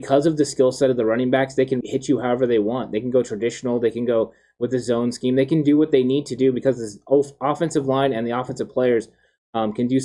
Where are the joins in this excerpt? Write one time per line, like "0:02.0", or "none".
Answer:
0:01.8